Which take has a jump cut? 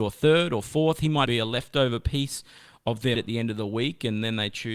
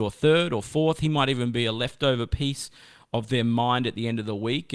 first; 2 cuts; at 1.3 s, 3.1 s

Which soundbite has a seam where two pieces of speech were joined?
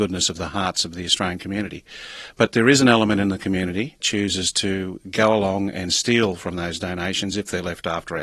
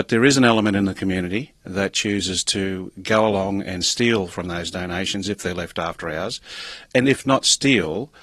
first; 1 cut; at 4.0 s

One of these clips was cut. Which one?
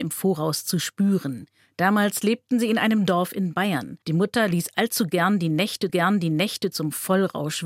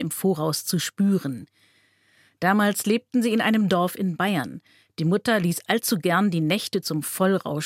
first; 3 cuts; at 1.6 s, 4.0 s, 5.9 s

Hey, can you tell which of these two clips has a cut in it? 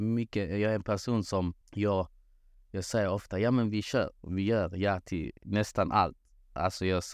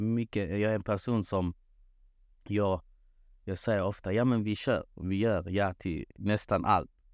first; 1 cut; at 1.6 s

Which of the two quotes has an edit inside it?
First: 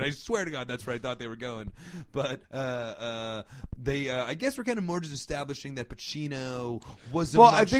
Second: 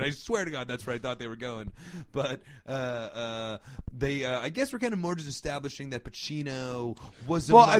first; 1 cut; at 2.4 s

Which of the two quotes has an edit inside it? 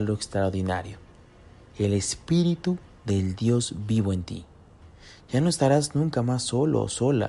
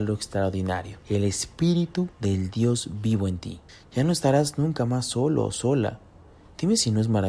second; 3 cuts; at 1.0 s, 2.1 s, 3.7 s

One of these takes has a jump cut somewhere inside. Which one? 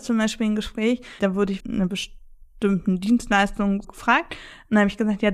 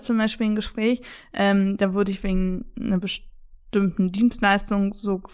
first; 3 cuts; at 1.2 s, 1.6 s, 3.8 s

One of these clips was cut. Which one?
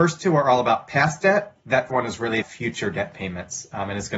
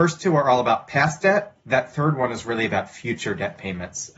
first; 2 cuts; at 1.9 s, 2.4 s

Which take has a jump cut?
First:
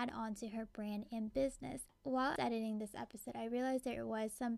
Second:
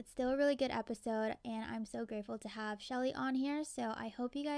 first; 1 cut; at 2.4 s

